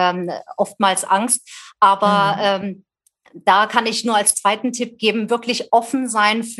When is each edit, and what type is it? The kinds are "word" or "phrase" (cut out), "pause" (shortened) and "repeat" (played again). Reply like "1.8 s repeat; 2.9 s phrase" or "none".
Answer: none